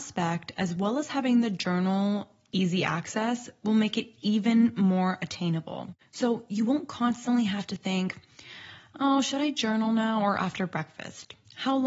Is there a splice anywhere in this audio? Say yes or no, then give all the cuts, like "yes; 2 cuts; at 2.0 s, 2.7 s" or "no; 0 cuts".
no; 0 cuts